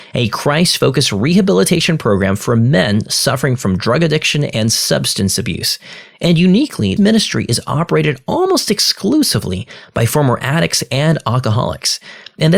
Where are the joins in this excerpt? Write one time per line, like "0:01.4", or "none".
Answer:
0:07.0